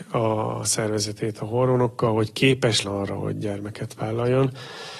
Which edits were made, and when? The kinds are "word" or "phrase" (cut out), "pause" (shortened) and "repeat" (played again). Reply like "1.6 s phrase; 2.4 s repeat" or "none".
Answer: 2.8 s word